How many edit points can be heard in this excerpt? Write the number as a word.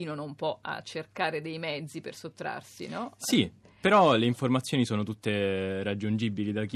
zero